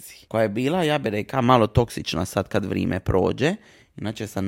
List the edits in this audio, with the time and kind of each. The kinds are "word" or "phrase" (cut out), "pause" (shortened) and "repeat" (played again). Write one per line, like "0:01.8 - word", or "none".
none